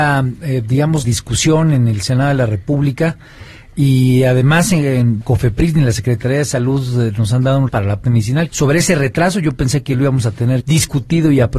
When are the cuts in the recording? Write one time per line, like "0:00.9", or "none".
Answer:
0:01.0
0:05.2
0:07.7
0:08.0
0:08.5
0:10.6